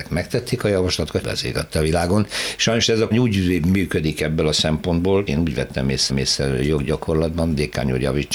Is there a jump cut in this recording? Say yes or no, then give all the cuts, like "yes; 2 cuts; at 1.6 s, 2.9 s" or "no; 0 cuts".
yes; 4 cuts; at 1.2 s, 3.1 s, 5.3 s, 6.1 s